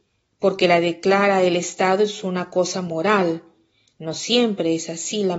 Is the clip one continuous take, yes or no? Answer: yes